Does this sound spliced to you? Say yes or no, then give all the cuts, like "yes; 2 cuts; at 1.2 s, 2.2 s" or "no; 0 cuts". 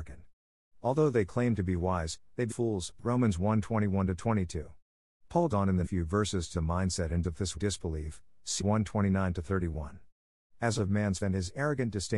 yes; 9 cuts; at 2.5 s, 5.5 s, 5.8 s, 6.5 s, 7.2 s, 7.5 s, 8.6 s, 10.8 s, 11.2 s